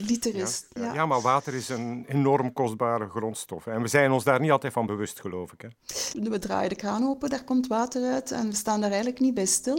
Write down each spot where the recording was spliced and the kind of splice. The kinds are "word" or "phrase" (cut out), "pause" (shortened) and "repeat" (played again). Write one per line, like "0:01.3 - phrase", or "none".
none